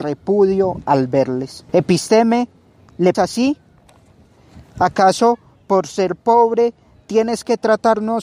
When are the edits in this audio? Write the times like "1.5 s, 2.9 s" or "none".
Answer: 1.7 s, 3.1 s

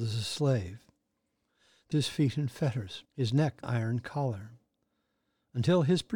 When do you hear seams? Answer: 1.9 s, 3.1 s, 3.6 s

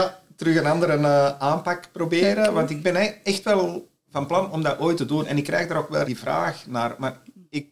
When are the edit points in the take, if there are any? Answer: 6.0 s

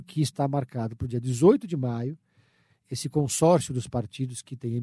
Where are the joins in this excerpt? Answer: none

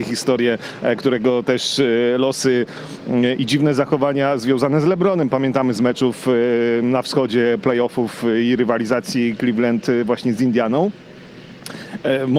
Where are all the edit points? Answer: none

